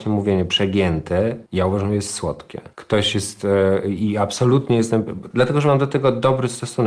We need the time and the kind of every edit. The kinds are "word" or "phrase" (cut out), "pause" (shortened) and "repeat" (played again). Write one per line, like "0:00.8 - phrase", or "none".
0:01.5 - pause
0:02.7 - pause